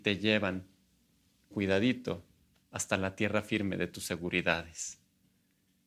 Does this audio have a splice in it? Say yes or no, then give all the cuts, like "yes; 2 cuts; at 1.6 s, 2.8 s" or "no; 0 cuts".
yes; 1 cut; at 1.5 s